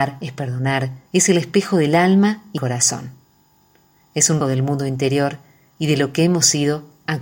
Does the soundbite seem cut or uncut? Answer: cut